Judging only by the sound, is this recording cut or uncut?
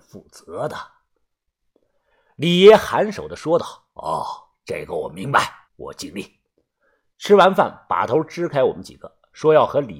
cut